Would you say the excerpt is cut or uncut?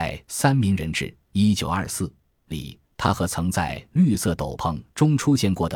cut